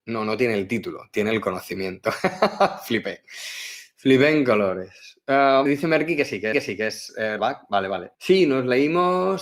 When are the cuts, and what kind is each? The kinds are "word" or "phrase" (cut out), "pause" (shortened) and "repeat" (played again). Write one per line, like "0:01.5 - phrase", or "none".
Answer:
0:05.7 - word
0:06.5 - repeat
0:07.4 - word
0:08.1 - pause

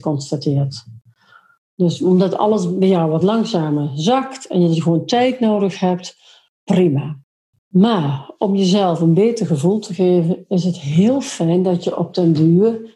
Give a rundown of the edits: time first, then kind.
none

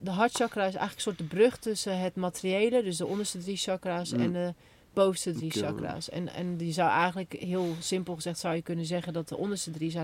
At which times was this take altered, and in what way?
none

